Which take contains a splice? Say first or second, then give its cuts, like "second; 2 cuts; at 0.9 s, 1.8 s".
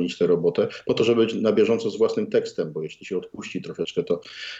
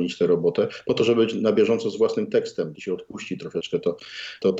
second; 1 cut; at 2.7 s